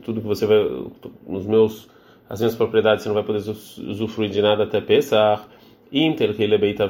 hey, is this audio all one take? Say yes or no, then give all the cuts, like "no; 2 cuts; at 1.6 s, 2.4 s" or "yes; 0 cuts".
yes; 0 cuts